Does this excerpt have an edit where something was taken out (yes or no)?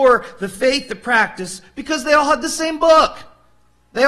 no